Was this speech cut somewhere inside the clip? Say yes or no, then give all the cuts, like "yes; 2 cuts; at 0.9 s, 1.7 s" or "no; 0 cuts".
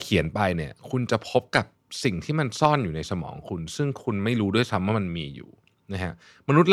no; 0 cuts